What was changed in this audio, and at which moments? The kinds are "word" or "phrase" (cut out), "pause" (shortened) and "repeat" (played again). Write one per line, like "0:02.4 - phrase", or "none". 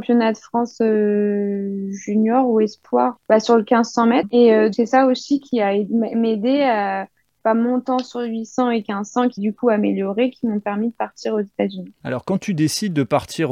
0:03.2 - word
0:04.7 - word
0:09.4 - word